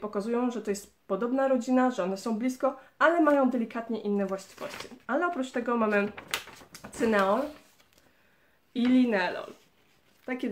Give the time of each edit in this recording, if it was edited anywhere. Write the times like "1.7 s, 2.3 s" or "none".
none

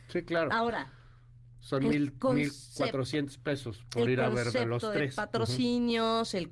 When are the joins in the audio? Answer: none

